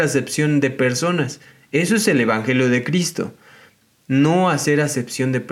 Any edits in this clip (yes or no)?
no